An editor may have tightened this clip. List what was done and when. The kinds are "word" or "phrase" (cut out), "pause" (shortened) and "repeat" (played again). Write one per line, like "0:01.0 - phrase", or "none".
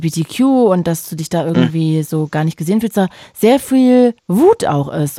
0:02.9 - word
0:04.2 - pause